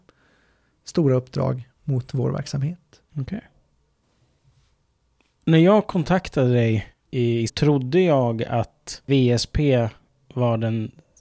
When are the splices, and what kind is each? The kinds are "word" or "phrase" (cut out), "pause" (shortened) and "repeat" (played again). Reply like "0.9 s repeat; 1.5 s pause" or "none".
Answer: 1.8 s pause; 3.1 s pause; 7.0 s pause; 7.5 s phrase